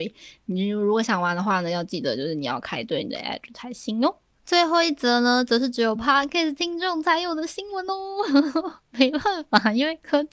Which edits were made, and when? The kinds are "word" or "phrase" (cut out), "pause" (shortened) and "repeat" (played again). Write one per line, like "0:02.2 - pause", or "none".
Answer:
none